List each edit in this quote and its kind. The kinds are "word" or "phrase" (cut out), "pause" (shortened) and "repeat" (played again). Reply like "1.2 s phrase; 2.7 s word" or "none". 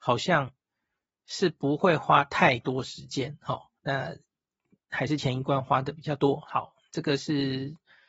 3.8 s pause